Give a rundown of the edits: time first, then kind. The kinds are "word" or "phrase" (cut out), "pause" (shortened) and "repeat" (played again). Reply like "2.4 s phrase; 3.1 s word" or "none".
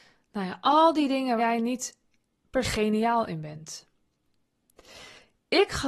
1.4 s word; 2.6 s word